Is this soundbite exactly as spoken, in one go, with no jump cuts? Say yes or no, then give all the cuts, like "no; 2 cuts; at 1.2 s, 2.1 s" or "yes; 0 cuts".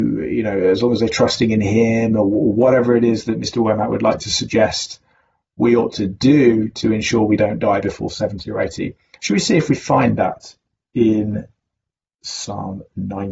yes; 0 cuts